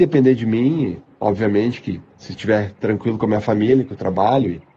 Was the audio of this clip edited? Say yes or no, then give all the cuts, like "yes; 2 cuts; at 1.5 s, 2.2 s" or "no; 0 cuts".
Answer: yes; 1 cut; at 2.1 s